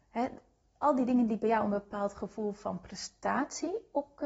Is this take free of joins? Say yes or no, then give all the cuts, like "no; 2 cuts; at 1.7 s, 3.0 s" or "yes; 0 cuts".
yes; 0 cuts